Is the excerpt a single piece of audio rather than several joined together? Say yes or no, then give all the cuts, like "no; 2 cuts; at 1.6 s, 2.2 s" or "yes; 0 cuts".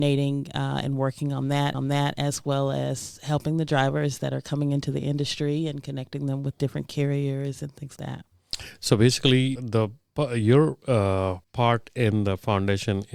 no; 4 cuts; at 1.7 s, 8.0 s, 9.6 s, 11.4 s